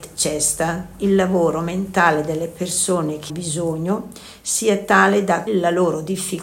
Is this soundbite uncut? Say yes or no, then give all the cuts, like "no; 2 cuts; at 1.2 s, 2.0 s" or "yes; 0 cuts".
no; 2 cuts; at 3.3 s, 5.5 s